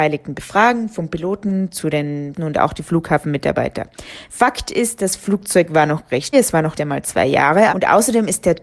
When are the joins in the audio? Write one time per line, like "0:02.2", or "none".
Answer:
0:02.3
0:06.3
0:06.7
0:07.7

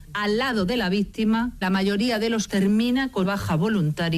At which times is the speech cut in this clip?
0:01.6
0:02.5
0:03.2

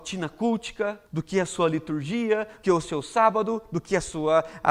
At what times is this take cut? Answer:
0:01.1
0:02.6

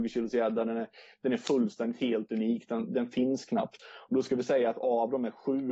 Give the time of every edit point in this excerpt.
none

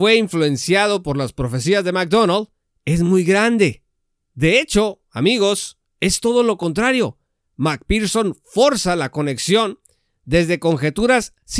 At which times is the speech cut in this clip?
none

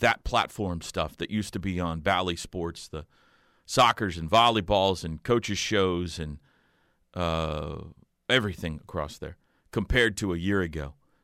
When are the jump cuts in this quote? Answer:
none

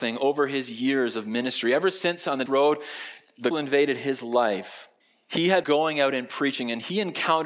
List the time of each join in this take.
0:02.5
0:03.5
0:05.0
0:05.6

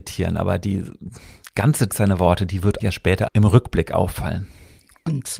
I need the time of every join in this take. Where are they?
0:01.9
0:02.8
0:03.3

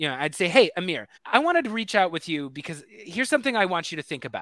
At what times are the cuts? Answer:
0:01.2

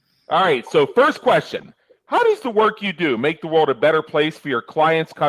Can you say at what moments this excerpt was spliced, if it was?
none

